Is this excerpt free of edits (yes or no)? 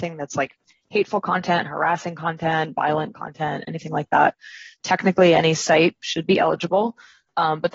yes